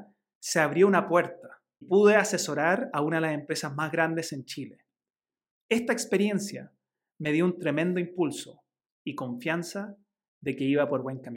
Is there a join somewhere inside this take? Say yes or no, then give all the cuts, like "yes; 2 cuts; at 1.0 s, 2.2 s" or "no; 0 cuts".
yes; 1 cut; at 1.8 s